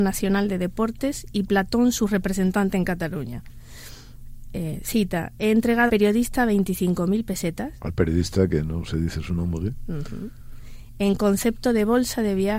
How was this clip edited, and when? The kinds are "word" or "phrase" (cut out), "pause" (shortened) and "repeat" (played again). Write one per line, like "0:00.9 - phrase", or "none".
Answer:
0:05.9 - word